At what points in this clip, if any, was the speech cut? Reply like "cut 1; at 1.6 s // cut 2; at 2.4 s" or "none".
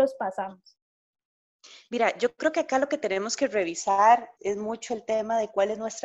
cut 1; at 4.4 s